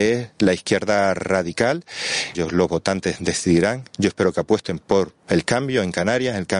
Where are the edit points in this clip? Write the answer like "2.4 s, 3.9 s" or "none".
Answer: 2.3 s